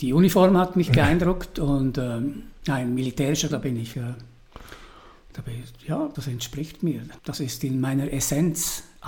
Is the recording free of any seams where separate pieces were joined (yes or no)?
no